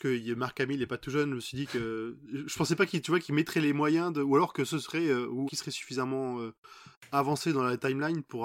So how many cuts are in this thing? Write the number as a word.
one